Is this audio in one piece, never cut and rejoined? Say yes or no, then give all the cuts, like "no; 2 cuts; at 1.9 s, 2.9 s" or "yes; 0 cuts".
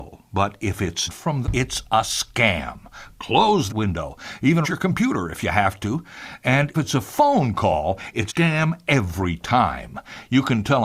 no; 6 cuts; at 1.1 s, 1.4 s, 3.7 s, 4.6 s, 6.7 s, 8.3 s